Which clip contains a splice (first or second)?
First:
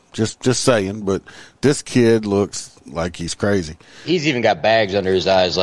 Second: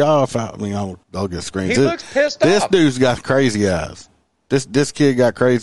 second